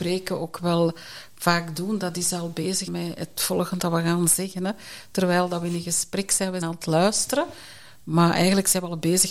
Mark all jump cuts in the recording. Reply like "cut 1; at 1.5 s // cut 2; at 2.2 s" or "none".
cut 1; at 2.9 s // cut 2; at 3.8 s // cut 3; at 6.6 s